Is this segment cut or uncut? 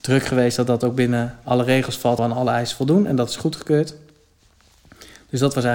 cut